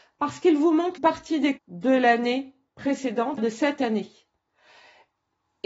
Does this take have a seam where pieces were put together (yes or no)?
yes